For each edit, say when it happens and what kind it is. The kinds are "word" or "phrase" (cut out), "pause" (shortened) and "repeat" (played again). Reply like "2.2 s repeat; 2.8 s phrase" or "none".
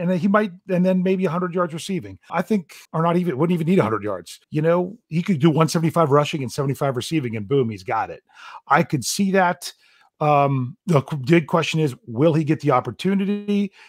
2.3 s word; 2.8 s pause; 4.4 s pause; 10.8 s pause